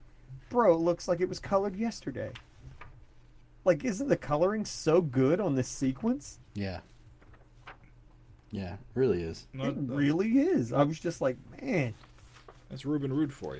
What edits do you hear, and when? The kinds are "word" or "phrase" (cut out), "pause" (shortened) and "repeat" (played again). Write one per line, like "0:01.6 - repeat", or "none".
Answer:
0:06.5 - pause